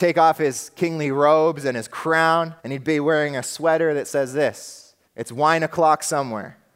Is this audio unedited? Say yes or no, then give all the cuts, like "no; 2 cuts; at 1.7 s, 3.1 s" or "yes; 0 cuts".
no; 2 cuts; at 2.6 s, 5.0 s